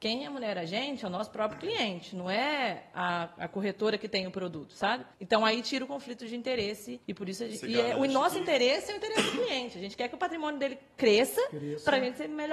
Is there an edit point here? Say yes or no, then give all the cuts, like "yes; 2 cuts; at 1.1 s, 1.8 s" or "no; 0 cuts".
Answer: yes; 2 cuts; at 5.1 s, 7.0 s